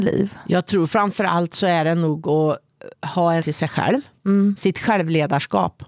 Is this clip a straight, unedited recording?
no; 2 cuts; at 2.9 s, 3.4 s

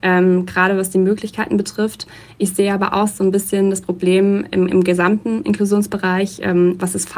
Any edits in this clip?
no; 0 cuts

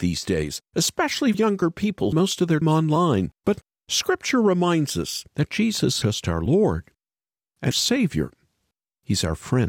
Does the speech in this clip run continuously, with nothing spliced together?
no; 7 cuts; at 1.3 s, 2.1 s, 2.6 s, 3.4 s, 5.3 s, 6.0 s, 7.7 s

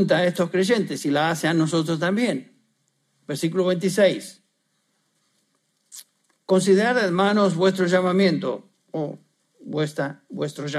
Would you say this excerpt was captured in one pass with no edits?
yes; 0 cuts

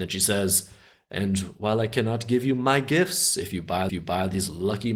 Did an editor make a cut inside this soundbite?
yes; 1 cut; at 3.9 s

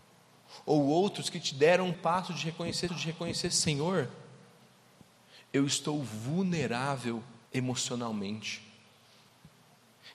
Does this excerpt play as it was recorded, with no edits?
no; 3 cuts; at 1.9 s, 2.9 s, 7.5 s

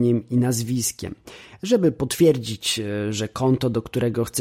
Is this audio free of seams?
yes; 0 cuts

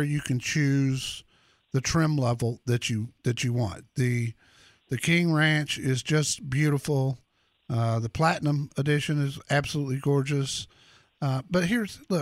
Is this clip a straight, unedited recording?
yes; 0 cuts

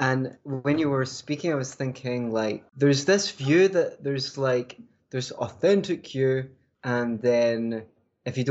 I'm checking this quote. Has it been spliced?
no; 0 cuts

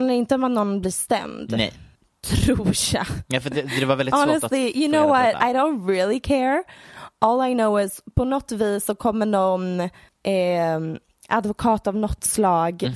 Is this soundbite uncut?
no; 2 cuts; at 2.0 s, 10.1 s

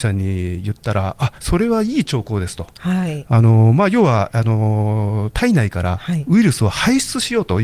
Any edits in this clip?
yes; 1 cut; at 1.4 s

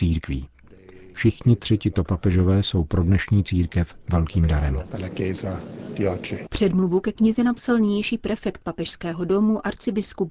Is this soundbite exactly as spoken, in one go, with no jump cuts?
yes; 0 cuts

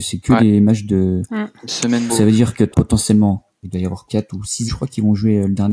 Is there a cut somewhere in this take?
yes; 5 cuts; at 2.1 s, 2.7 s, 3.6 s, 4.1 s, 4.7 s

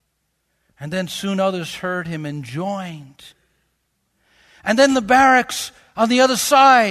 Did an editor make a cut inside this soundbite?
no; 0 cuts

